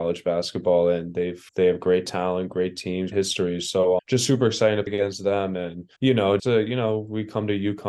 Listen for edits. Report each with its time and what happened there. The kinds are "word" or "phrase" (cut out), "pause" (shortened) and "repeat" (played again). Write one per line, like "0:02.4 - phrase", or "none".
0:01.5 - pause
0:03.1 - word
0:04.0 - word
0:04.9 - word
0:06.0 - pause
0:06.4 - word

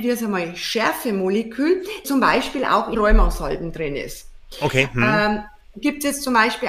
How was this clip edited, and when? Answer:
0:02.0 - word
0:02.9 - word

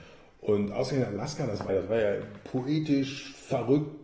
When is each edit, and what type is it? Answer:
0:01.7 - word

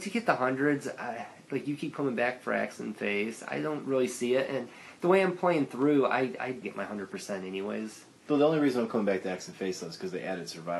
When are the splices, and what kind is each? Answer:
0:06.6 - phrase

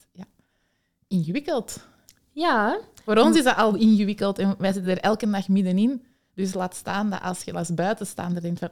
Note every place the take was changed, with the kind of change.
none

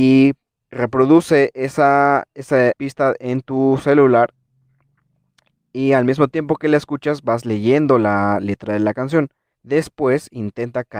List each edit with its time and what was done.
0:02.7 - word
0:09.5 - pause

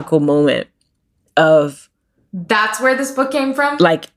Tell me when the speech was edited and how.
none

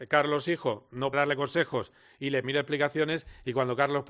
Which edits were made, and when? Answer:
0:01.1 - word
0:02.4 - word

